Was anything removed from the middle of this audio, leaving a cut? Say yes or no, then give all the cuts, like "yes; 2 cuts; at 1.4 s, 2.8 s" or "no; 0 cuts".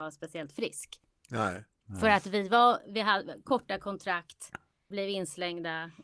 yes; 1 cut; at 4.9 s